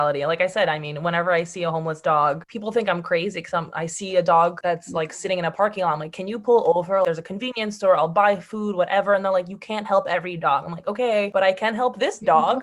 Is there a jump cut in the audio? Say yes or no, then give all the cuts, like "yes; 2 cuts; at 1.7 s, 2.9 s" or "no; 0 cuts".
yes; 1 cut; at 2.5 s